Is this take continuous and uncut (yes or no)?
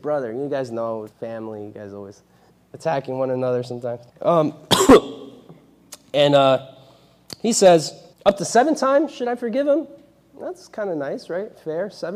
no